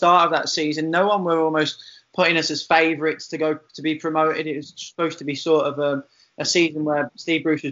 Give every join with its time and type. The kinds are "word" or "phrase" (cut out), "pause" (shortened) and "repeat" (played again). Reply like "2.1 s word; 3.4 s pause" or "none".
none